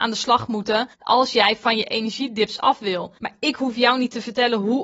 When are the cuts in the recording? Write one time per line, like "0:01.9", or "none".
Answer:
0:00.9
0:03.2